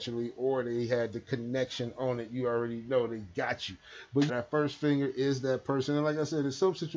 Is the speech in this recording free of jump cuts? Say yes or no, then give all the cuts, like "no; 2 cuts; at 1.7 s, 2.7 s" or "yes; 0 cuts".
no; 1 cut; at 4.3 s